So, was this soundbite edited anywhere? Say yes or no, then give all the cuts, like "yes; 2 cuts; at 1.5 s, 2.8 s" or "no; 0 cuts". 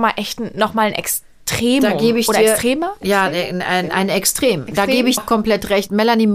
yes; 1 cut; at 5.2 s